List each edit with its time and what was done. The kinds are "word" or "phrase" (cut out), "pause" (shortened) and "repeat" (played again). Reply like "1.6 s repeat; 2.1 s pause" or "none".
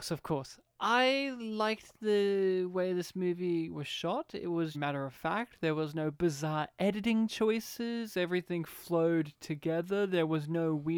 4.7 s phrase